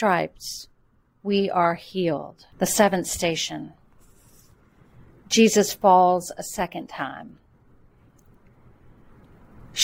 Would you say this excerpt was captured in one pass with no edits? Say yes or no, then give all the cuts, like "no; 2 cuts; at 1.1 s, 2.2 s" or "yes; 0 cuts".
no; 1 cut; at 2.5 s